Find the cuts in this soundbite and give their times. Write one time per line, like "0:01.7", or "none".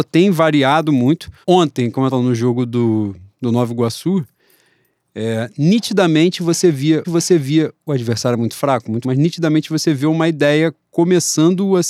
0:01.4
0:02.1
0:07.0
0:09.0